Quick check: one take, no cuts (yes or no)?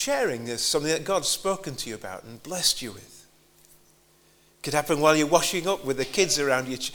yes